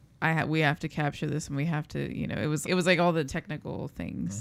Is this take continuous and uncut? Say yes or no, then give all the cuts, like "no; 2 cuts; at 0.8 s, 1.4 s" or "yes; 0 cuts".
no; 2 cuts; at 2.6 s, 3.3 s